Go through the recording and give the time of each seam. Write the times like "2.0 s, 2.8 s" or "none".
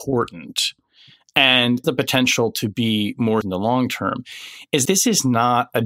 1.8 s, 3.4 s, 4.9 s